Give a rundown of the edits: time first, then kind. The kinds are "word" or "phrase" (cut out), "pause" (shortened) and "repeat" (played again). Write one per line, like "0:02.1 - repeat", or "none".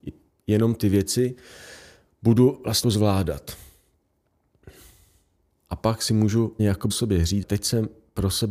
0:02.8 - word
0:06.6 - word
0:06.9 - word
0:07.4 - word